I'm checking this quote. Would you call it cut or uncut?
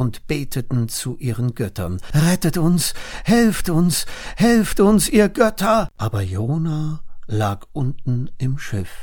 cut